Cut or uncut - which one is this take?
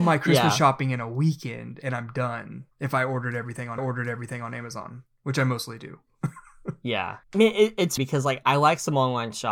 cut